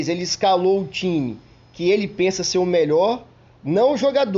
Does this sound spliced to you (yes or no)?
no